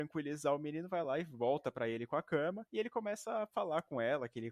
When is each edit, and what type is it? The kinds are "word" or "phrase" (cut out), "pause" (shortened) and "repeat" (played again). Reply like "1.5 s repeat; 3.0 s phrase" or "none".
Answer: none